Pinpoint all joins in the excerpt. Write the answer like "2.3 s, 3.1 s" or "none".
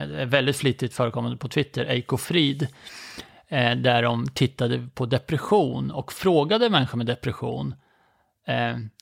none